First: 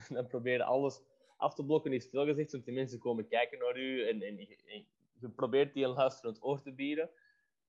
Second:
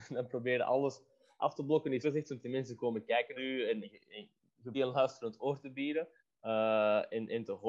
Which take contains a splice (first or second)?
second